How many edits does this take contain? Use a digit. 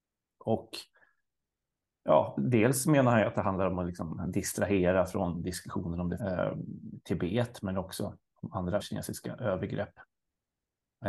2